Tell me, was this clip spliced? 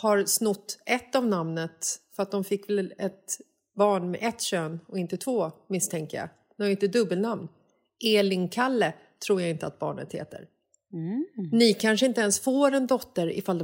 no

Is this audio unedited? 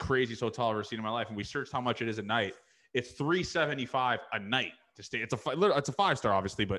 yes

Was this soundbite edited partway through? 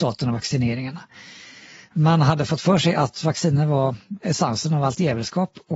no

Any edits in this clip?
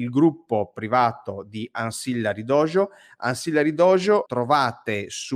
yes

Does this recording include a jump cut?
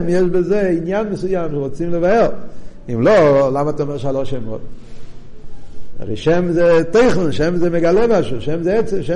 no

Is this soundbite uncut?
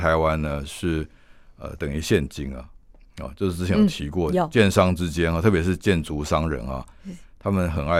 yes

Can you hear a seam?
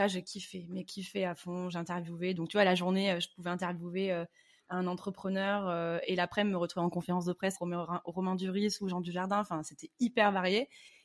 yes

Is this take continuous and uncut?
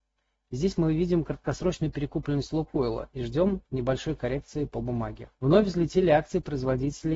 no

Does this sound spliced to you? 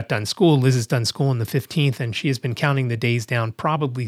no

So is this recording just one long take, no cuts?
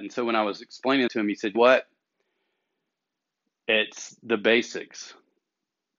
no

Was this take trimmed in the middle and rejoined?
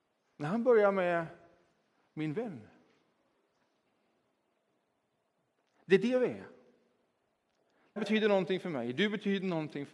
yes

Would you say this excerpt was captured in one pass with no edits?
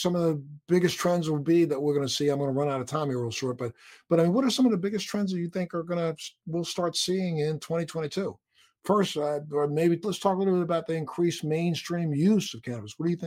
yes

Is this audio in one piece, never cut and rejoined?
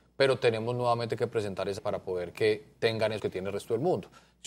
no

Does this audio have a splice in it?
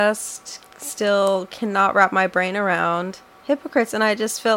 yes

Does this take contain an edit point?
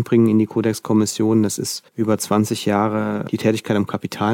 yes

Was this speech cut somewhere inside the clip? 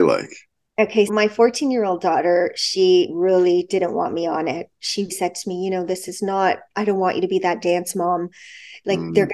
yes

